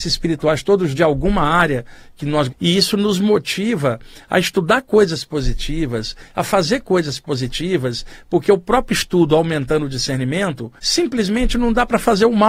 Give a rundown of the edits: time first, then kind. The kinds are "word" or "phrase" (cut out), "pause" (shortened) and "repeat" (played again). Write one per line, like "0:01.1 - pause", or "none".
0:00.9 - word
0:02.5 - word
0:10.8 - pause

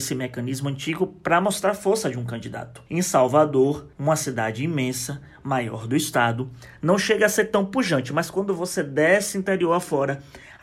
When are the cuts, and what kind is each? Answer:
0:02.9 - pause
0:03.9 - pause

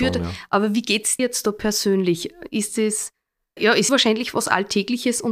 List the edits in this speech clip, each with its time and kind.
0:01.2 - word
0:03.6 - word
0:03.9 - word

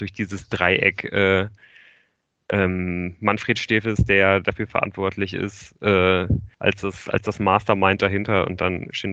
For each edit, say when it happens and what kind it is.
0:06.5 - pause

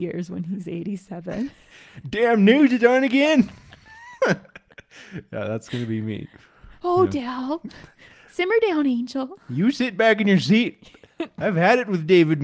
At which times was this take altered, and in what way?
none

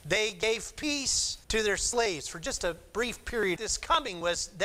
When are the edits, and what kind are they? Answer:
0:01.4 - pause
0:03.6 - phrase

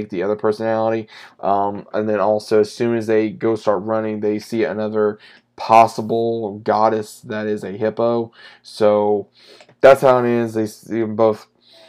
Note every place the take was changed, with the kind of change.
none

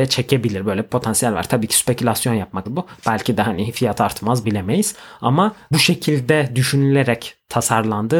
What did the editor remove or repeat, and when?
0:02.7 - word
0:04.4 - word
0:05.7 - word

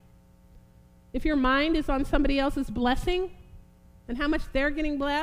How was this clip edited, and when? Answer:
none

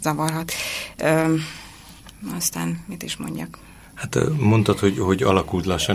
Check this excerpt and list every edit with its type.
none

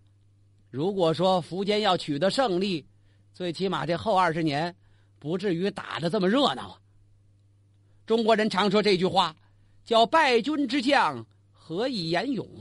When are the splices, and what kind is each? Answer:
none

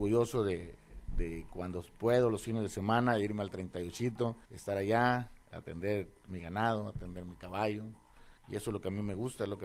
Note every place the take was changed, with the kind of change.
0:04.5 - pause
0:05.4 - pause
0:08.4 - pause

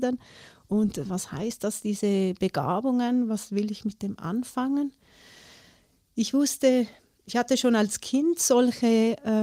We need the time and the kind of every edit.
none

